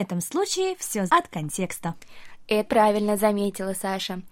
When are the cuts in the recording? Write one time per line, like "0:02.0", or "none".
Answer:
0:01.1
0:02.7